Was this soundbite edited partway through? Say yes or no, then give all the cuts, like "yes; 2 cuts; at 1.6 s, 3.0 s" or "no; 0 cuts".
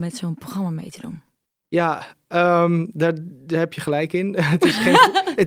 no; 0 cuts